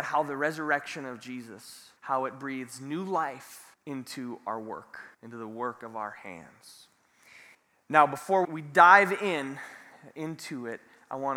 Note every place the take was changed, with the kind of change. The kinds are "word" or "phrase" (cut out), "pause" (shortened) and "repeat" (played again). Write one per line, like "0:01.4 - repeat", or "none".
0:02.0 - pause
0:03.7 - pause
0:05.1 - pause
0:07.5 - pause
0:08.4 - word